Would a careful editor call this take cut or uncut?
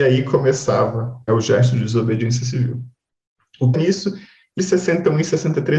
cut